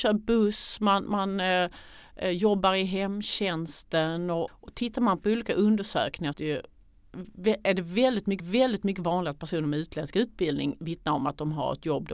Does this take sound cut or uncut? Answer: cut